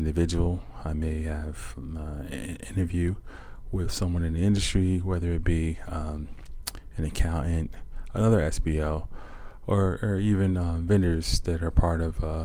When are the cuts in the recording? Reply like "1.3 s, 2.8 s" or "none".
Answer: none